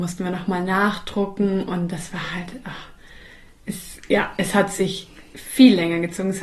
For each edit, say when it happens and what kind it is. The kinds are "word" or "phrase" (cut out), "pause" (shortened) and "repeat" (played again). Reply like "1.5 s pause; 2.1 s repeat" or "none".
none